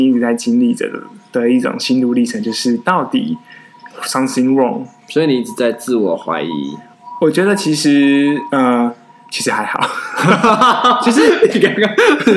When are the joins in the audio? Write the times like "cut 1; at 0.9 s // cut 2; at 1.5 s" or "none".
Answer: cut 1; at 3.9 s